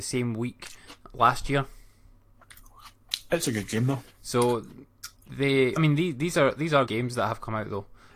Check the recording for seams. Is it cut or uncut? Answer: cut